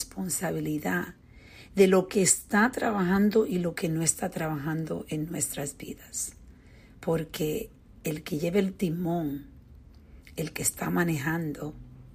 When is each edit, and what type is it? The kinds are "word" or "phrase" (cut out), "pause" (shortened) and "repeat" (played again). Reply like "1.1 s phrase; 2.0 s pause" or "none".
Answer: 7.9 s pause

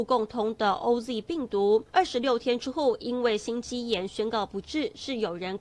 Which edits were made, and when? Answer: 1.9 s pause

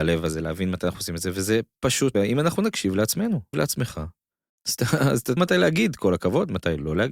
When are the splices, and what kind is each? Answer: 2.1 s word; 3.5 s word; 4.5 s pause; 5.4 s word

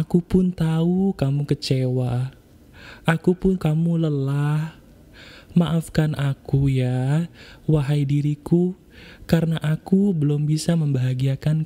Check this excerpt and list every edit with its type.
3.6 s word

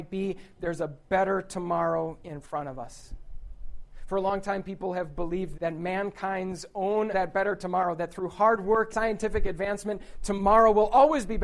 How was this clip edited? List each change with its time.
5.5 s word; 7.1 s phrase; 8.9 s word

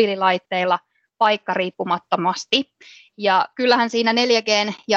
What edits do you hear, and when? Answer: none

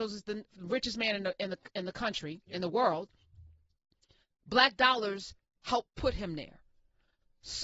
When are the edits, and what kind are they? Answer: none

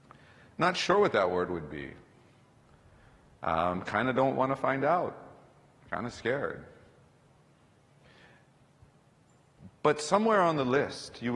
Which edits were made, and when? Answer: none

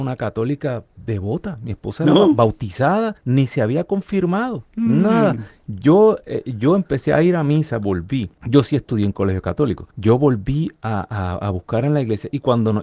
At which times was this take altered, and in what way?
3.2 s pause; 4.7 s pause; 8.4 s pause; 9.9 s pause

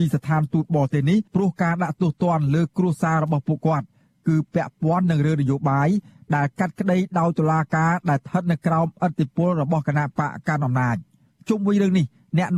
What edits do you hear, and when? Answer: 1.3 s pause; 11.3 s pause

